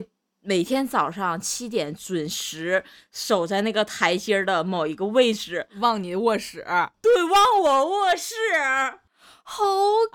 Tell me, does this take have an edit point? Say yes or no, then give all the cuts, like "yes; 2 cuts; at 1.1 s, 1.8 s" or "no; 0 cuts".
no; 0 cuts